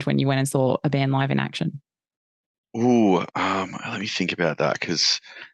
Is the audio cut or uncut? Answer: uncut